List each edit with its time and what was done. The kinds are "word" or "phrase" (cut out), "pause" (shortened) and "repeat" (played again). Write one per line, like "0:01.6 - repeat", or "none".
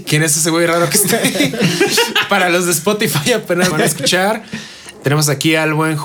0:03.7 - word